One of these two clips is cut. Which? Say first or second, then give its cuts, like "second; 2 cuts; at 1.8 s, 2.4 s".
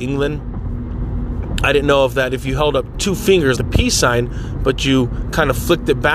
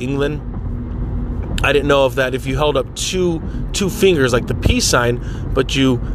first; 2 cuts; at 2.9 s, 3.6 s